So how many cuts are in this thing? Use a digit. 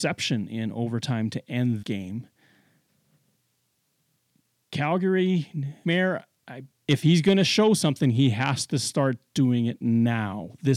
3